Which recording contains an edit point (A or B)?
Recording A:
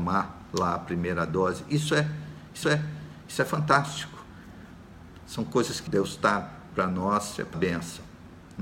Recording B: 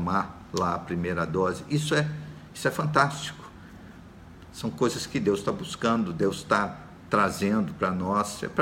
A